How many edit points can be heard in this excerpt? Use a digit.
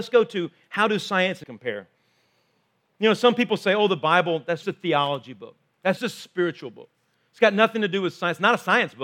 3